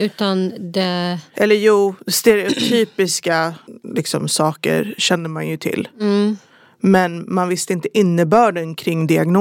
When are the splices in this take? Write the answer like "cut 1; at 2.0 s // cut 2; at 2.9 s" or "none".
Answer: none